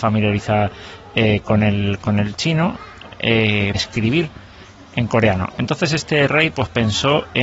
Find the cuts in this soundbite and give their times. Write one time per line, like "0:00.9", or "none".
0:03.7